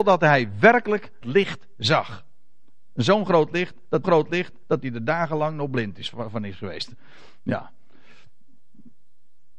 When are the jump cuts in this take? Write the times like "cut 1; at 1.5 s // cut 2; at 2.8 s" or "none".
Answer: cut 1; at 1.2 s // cut 2; at 4.0 s